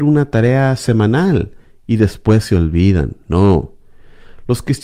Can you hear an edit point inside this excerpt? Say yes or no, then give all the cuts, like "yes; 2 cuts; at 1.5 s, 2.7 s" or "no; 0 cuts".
no; 0 cuts